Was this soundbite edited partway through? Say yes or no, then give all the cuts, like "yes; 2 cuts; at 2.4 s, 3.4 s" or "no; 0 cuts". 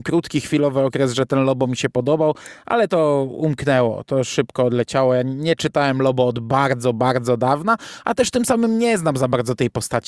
no; 0 cuts